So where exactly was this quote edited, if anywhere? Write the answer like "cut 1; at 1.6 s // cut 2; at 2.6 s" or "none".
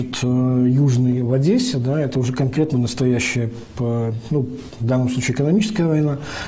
cut 1; at 2.7 s